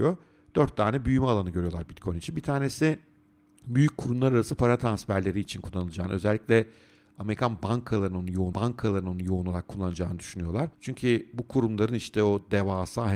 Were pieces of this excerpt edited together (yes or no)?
yes